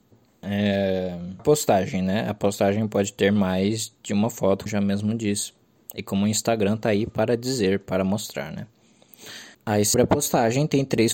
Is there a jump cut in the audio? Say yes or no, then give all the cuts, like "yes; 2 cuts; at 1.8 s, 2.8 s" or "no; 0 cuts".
yes; 4 cuts; at 1.4 s, 4.7 s, 9.5 s, 9.9 s